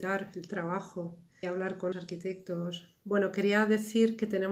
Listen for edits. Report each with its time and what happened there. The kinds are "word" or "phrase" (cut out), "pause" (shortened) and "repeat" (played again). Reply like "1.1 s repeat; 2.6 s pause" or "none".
1.4 s word; 1.9 s word